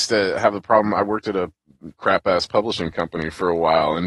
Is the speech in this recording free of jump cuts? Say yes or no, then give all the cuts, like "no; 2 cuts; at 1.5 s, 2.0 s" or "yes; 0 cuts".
yes; 0 cuts